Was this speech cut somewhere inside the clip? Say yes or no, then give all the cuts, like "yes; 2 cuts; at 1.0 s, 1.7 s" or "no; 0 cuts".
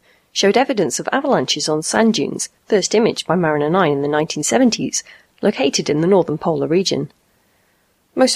no; 0 cuts